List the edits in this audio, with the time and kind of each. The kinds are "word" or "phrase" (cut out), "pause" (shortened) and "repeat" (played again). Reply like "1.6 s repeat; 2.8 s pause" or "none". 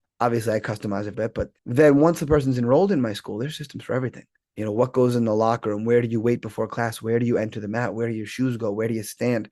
1.1 s phrase; 1.6 s pause; 4.4 s pause